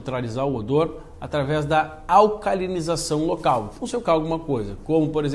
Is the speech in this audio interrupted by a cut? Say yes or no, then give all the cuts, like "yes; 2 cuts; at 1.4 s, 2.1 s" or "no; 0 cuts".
yes; 1 cut; at 4.0 s